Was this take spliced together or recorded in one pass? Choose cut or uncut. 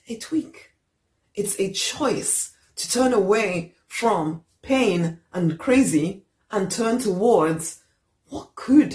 uncut